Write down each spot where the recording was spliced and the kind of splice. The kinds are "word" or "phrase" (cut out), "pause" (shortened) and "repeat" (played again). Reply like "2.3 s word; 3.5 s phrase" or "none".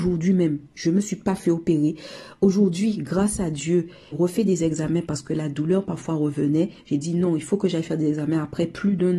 4.1 s word